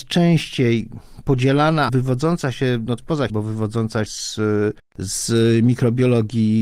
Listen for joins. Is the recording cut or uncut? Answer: cut